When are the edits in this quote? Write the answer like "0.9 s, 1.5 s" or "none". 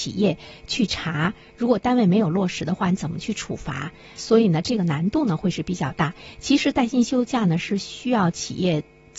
none